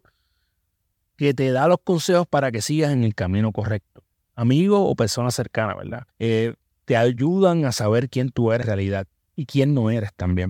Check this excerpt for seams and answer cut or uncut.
cut